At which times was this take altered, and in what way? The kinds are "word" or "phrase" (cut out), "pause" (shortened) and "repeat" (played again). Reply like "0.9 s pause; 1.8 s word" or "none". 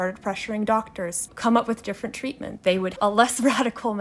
1.3 s word; 2.6 s word; 2.9 s word